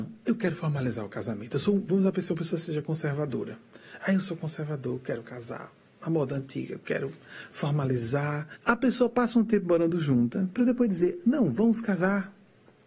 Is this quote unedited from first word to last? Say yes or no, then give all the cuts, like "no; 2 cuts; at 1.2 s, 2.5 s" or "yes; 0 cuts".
yes; 0 cuts